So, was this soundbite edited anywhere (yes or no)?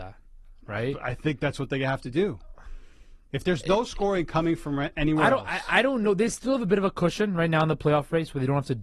no